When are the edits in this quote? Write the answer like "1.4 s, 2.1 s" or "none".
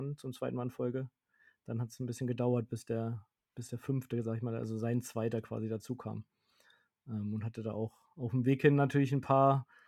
none